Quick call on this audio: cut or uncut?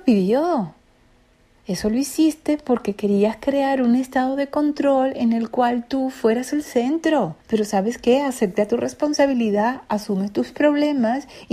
cut